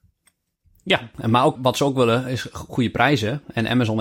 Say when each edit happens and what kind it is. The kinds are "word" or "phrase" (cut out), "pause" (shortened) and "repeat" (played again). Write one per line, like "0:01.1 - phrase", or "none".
0:01.6 - word